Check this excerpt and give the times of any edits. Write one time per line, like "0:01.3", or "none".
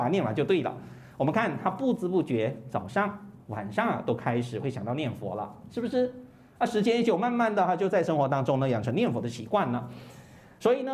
0:03.4